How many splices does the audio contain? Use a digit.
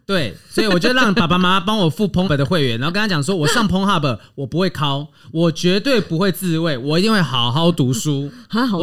1